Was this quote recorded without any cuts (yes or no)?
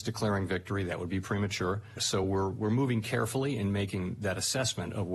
yes